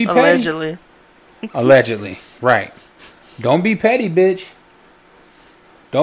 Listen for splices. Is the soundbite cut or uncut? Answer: uncut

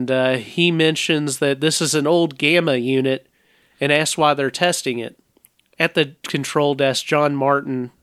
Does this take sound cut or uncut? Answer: uncut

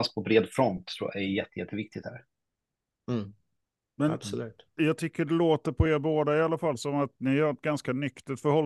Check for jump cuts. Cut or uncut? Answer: uncut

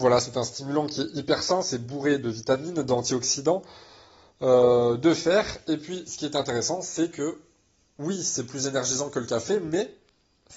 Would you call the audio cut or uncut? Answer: uncut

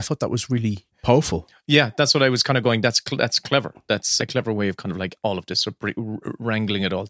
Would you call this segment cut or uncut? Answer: cut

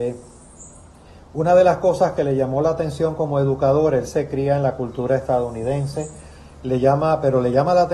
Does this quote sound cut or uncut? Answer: uncut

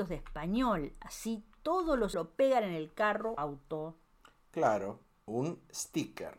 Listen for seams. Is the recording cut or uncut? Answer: cut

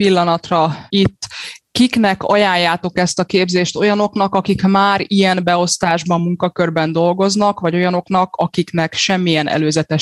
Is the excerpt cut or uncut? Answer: uncut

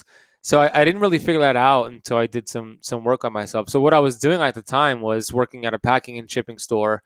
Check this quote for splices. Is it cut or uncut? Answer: uncut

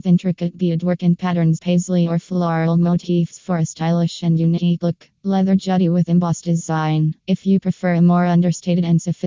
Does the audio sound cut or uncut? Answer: cut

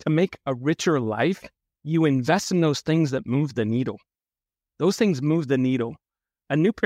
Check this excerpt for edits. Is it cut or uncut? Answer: uncut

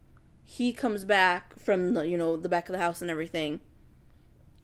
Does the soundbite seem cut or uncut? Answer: uncut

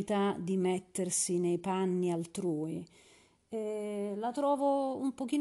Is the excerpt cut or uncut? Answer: uncut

